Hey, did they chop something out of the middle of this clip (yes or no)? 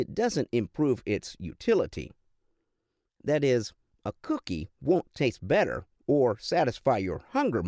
no